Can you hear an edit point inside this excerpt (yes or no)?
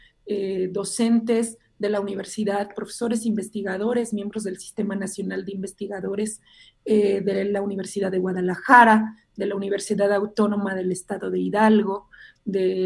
no